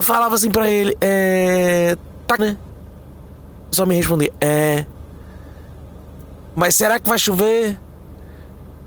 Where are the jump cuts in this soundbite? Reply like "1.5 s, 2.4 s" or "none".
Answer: 2.4 s, 3.7 s, 6.6 s

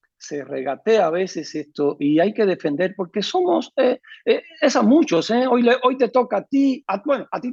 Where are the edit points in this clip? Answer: none

